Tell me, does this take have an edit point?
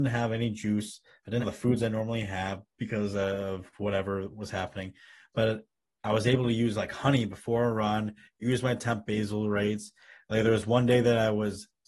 yes; 1 cut; at 1.4 s

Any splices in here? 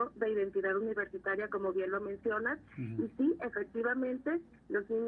no; 0 cuts

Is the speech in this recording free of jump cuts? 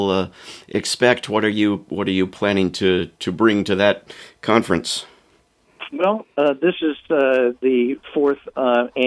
yes; 0 cuts

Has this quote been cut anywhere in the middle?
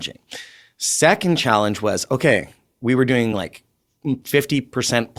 no; 0 cuts

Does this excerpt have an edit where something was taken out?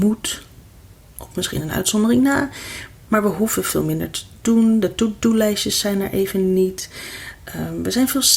no; 0 cuts

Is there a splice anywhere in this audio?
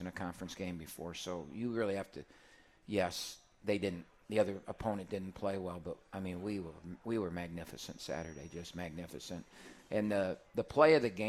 no; 0 cuts

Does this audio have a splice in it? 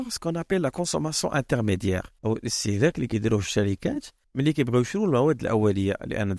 yes; 2 cuts; at 2.2 s, 4.2 s

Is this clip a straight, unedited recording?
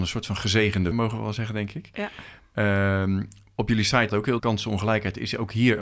no; 3 cuts; at 0.9 s, 4.1 s, 4.4 s

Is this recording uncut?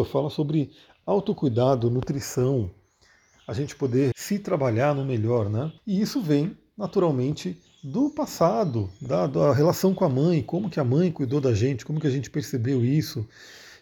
no; 2 cuts; at 4.1 s, 5.8 s

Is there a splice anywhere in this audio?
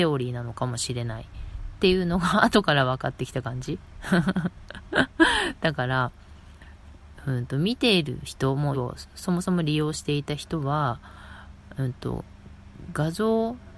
yes; 1 cut; at 8.7 s

